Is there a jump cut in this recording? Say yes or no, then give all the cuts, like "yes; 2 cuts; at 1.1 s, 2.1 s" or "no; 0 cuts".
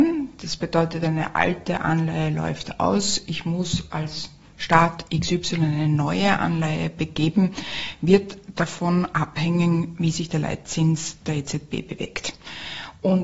no; 0 cuts